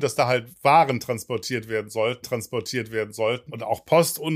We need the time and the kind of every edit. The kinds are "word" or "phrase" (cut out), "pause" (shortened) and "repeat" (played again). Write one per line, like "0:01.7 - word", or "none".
0:02.2 - repeat